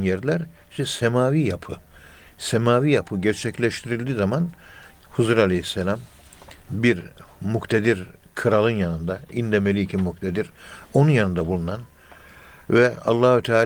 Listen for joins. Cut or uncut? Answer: cut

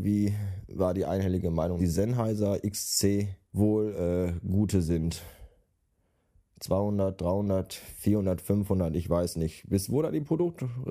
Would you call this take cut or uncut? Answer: cut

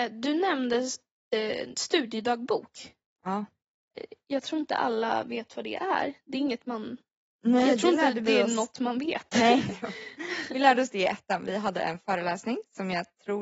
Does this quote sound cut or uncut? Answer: uncut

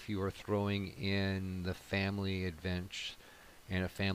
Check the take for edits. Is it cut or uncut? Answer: uncut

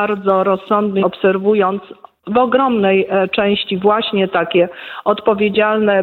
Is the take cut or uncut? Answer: cut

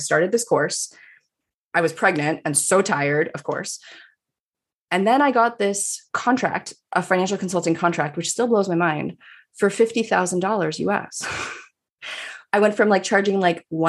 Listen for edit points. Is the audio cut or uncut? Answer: uncut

